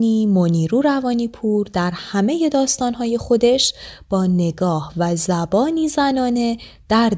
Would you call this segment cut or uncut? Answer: uncut